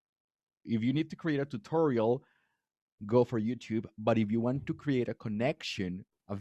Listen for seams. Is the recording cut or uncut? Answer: uncut